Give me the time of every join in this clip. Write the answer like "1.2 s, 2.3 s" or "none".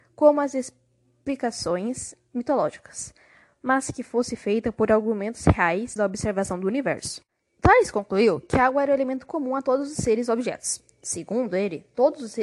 6.0 s